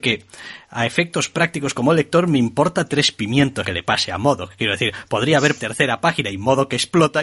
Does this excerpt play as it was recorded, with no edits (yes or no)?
no